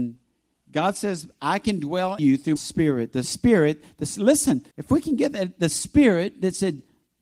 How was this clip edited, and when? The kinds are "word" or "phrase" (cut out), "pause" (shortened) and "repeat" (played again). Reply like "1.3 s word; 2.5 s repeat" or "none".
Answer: 2.2 s word; 2.6 s word; 3.2 s word; 4.7 s pause; 5.7 s word